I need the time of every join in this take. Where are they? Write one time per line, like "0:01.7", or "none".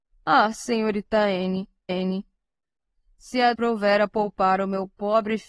0:01.9
0:03.5